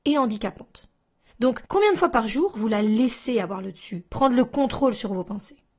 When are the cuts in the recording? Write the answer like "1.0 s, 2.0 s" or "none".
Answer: 1.7 s